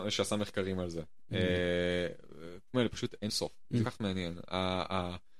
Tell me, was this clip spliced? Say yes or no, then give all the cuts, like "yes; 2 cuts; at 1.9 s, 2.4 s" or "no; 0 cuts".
yes; 3 cuts; at 2.7 s, 3.3 s, 3.8 s